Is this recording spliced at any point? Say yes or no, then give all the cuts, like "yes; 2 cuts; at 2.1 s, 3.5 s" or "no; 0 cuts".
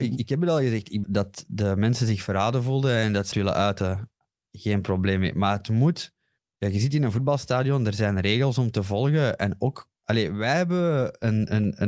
yes; 4 cuts; at 1.0 s, 3.3 s, 6.4 s, 10.0 s